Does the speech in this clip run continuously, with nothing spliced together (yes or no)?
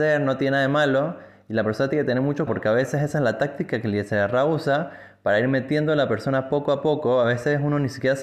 no